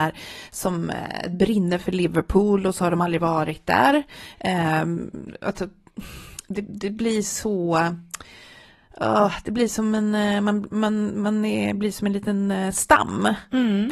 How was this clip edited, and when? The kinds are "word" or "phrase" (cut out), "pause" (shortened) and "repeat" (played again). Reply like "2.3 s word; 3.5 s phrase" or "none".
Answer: none